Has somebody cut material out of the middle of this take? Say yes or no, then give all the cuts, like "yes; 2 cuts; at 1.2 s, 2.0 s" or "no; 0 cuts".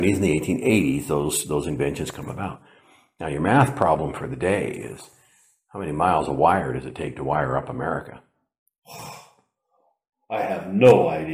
no; 0 cuts